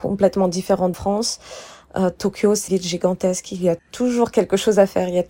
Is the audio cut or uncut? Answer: cut